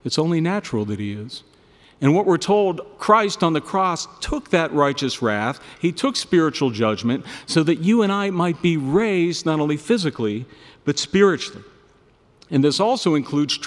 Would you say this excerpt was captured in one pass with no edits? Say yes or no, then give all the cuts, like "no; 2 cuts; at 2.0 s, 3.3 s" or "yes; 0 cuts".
yes; 0 cuts